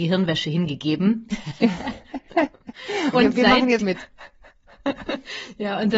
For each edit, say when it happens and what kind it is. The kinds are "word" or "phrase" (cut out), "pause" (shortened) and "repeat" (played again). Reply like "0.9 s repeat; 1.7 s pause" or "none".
3.1 s word; 3.8 s word